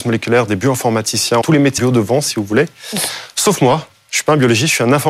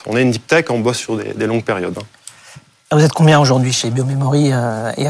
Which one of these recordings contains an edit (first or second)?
first